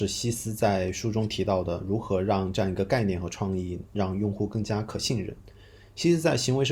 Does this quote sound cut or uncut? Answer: uncut